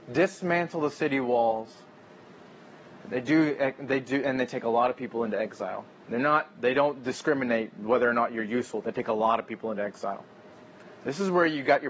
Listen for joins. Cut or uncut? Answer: uncut